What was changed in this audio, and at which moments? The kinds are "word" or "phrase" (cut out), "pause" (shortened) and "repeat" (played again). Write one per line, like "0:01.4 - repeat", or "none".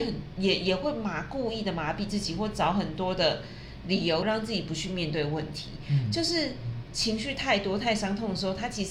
0:04.2 - phrase